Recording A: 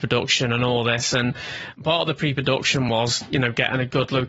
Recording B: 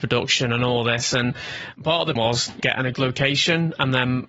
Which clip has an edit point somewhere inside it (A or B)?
B